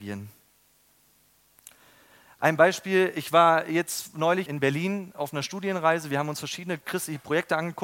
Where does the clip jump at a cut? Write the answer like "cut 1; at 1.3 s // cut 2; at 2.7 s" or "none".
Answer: cut 1; at 4.5 s // cut 2; at 6.8 s